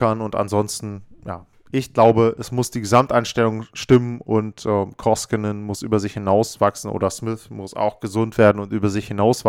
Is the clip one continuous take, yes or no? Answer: yes